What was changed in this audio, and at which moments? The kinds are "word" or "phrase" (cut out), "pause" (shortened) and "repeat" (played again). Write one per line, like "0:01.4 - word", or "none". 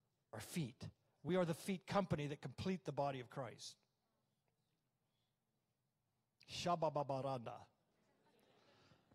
none